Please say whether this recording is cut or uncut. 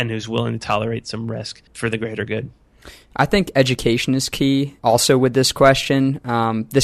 cut